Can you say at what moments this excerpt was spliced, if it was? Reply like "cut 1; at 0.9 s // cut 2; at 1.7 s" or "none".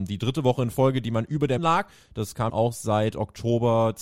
cut 1; at 1.6 s // cut 2; at 2.5 s

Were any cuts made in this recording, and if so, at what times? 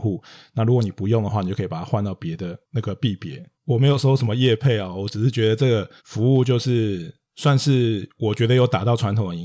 cut 1; at 6.0 s

